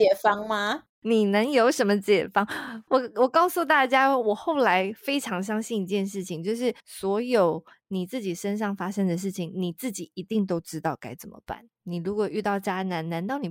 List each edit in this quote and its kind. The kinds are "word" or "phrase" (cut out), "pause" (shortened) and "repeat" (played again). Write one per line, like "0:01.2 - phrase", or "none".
0:00.9 - pause
0:06.8 - pause
0:11.8 - pause